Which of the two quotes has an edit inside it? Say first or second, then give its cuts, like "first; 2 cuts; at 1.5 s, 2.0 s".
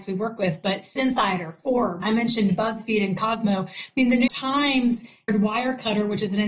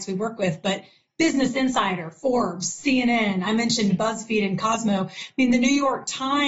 first; 4 cuts; at 1.0 s, 2.0 s, 4.3 s, 5.3 s